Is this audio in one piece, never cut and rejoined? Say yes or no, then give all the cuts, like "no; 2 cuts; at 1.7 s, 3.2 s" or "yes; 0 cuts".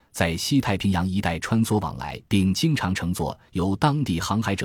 no; 1 cut; at 2.3 s